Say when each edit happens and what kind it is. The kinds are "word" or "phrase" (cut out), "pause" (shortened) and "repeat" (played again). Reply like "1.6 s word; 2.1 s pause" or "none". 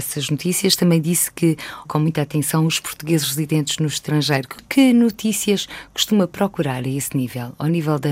1.8 s word